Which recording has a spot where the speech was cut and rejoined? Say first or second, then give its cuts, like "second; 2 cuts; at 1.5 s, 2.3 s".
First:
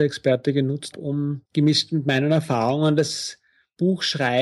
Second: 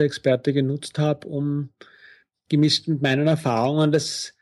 first; 2 cuts; at 0.9 s, 1.5 s